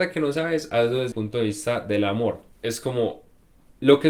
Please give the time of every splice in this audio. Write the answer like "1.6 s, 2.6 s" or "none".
1.1 s, 2.5 s